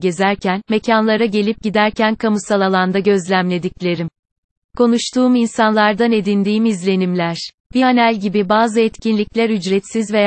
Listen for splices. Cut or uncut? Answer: uncut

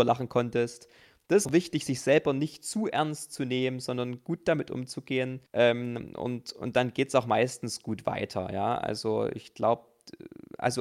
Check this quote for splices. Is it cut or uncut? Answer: cut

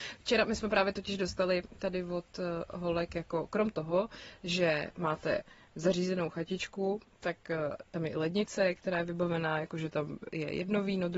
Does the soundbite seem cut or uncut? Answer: uncut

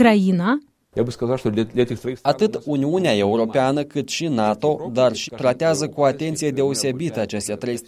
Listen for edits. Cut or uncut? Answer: cut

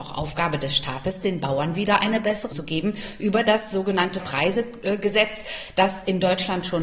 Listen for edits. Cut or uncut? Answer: cut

